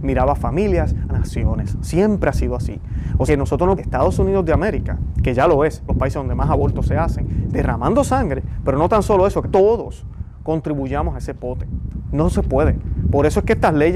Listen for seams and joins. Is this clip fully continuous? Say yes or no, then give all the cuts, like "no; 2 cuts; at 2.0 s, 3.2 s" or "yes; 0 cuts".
no; 6 cuts; at 1.1 s, 3.3 s, 3.8 s, 5.9 s, 7.5 s, 9.4 s